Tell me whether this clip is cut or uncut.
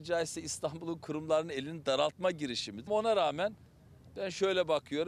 cut